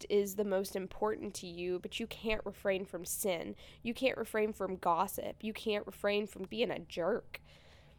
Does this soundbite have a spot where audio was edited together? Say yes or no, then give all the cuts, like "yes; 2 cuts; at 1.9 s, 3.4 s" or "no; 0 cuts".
yes; 1 cut; at 6.5 s